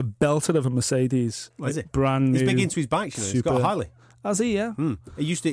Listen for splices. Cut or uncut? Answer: uncut